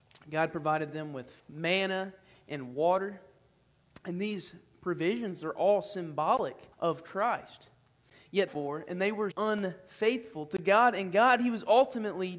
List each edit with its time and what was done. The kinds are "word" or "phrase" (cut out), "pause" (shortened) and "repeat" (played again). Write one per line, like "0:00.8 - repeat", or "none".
0:01.4 - pause
0:06.7 - pause
0:08.5 - phrase
0:09.3 - word